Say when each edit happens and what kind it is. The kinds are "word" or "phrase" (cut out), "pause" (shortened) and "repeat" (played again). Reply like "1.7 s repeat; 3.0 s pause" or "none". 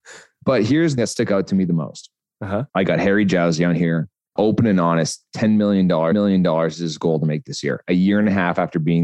1.0 s word; 2.7 s pause; 4.4 s word; 6.1 s repeat